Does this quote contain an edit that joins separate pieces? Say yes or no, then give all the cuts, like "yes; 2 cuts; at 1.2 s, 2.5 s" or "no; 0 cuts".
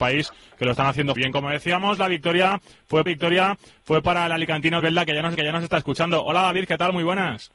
yes; 4 cuts; at 1.2 s, 3.1 s, 4.8 s, 5.3 s